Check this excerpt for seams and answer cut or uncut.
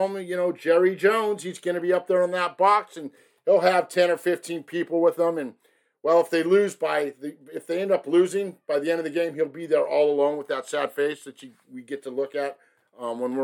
uncut